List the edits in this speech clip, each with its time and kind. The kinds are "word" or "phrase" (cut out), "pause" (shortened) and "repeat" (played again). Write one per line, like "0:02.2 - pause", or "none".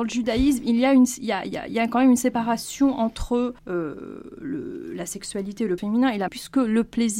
0:03.6 - pause
0:05.8 - word
0:06.3 - word